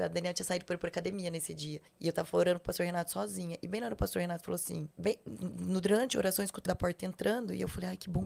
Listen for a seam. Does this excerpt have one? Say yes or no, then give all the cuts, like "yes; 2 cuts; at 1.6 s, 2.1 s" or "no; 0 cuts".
yes; 3 cuts; at 1.9 s, 4.9 s, 6.7 s